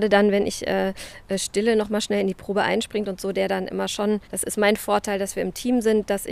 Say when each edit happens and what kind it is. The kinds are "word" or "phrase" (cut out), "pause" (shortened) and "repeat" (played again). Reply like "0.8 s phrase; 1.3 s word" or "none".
4.2 s pause